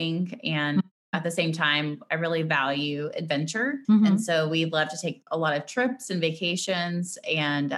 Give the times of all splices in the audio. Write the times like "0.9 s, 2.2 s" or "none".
3.8 s